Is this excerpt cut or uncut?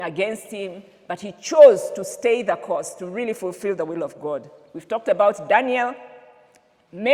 uncut